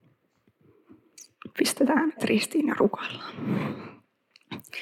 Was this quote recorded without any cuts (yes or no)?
no